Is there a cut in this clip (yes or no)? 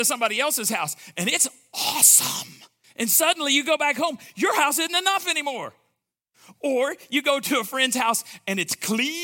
yes